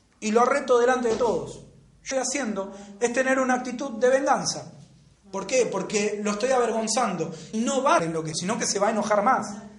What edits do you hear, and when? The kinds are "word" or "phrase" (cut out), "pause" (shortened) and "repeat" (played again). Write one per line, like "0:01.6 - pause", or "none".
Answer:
0:02.1 - phrase
0:05.1 - pause
0:07.5 - word
0:08.0 - word
0:08.3 - phrase

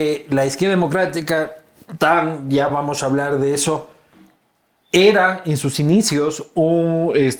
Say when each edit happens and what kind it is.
none

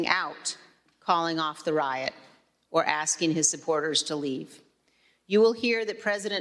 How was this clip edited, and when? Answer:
none

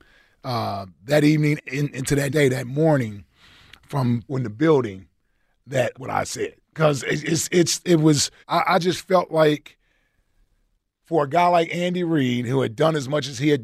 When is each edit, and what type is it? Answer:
0:01.6 - phrase
0:02.3 - word
0:04.3 - word
0:05.9 - word
0:06.6 - pause
0:08.4 - pause

